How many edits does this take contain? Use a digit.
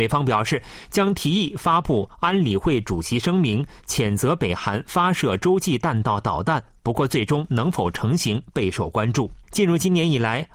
1